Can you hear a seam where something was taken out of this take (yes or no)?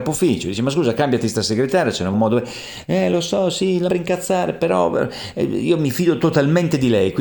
yes